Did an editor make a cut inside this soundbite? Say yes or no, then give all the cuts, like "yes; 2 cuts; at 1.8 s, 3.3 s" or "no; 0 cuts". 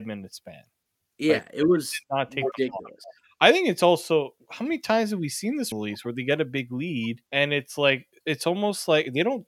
yes; 4 cuts; at 4.4 s, 5.7 s, 7.3 s, 8.2 s